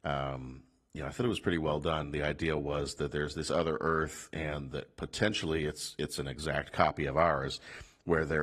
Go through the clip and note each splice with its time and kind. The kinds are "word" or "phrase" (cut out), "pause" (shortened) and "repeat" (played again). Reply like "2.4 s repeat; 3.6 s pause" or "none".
none